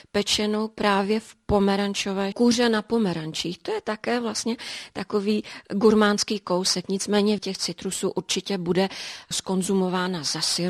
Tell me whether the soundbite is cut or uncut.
cut